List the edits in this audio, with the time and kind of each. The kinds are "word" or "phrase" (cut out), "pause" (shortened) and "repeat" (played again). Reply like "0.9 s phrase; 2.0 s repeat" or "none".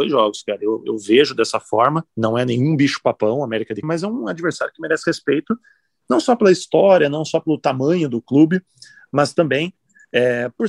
2.1 s pause; 3.8 s word